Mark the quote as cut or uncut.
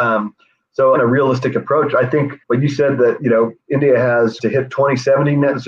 cut